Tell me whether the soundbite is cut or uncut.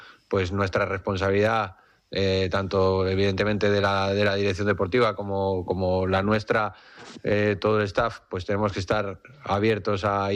uncut